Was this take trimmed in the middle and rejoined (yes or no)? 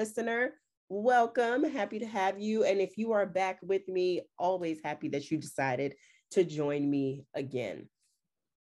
no